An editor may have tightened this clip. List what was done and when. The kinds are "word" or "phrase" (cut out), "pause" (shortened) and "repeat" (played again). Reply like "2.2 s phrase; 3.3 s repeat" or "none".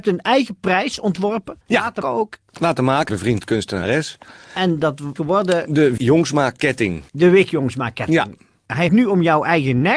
1.6 s pause; 2.0 s word; 3.1 s phrase; 5.2 s word; 6.0 s word; 7.1 s pause; 8.9 s word